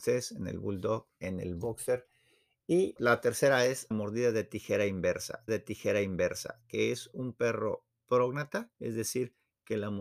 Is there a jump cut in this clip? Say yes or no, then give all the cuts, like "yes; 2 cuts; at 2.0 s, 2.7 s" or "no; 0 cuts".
yes; 4 cuts; at 3.0 s, 3.9 s, 5.5 s, 8.7 s